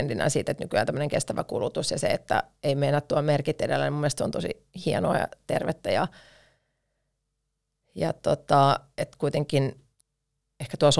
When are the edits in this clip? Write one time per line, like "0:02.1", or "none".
none